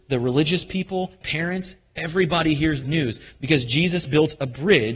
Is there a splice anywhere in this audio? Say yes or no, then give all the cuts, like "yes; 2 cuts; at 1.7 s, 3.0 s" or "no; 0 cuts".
yes; 2 cuts; at 1.2 s, 2.8 s